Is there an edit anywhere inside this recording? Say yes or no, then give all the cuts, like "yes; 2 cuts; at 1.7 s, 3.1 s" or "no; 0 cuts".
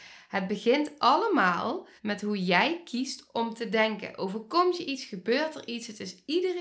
yes; 1 cut; at 2.0 s